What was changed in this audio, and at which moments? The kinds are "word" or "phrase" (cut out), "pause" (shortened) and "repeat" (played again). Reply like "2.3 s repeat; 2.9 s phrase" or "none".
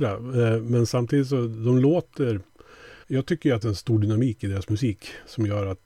3.0 s pause; 3.6 s phrase